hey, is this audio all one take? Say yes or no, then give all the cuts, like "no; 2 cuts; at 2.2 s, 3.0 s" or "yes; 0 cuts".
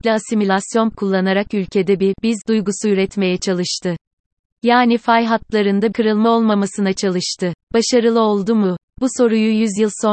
no; 3 cuts; at 0.9 s, 5.9 s, 7.6 s